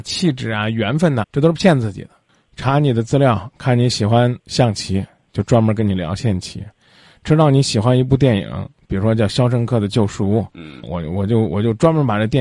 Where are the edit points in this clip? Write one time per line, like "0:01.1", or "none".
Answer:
0:01.2
0:04.4
0:10.8